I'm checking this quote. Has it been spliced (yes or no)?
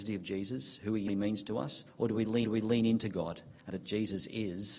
yes